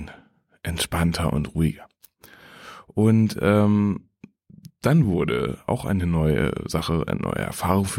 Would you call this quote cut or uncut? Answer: uncut